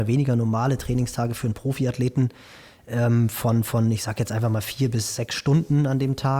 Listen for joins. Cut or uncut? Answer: uncut